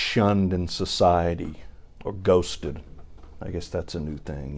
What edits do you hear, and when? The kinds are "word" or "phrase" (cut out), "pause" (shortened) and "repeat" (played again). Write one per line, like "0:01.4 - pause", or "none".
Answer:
0:01.8 - pause

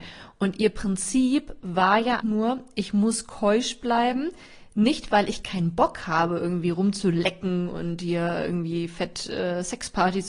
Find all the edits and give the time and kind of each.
0:02.2 - word

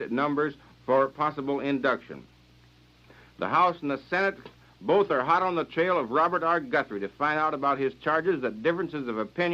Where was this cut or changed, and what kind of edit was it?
none

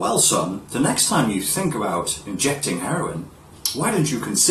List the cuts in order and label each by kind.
none

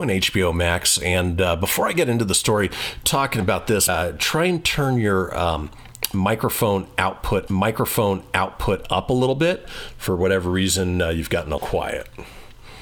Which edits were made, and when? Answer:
0:03.0 - phrase
0:03.9 - word
0:07.5 - repeat
0:11.6 - word

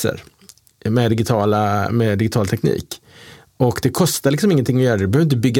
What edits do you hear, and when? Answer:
none

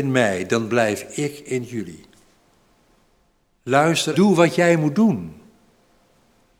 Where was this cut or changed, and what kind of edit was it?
0:04.1 - word

